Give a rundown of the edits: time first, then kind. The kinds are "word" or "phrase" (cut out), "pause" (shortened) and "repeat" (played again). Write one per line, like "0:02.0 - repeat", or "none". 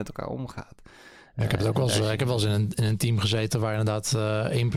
none